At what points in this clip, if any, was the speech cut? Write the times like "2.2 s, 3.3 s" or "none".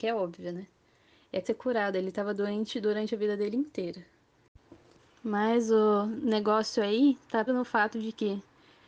1.4 s, 5.0 s, 7.5 s